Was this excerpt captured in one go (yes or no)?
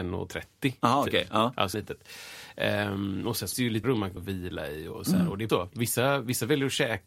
no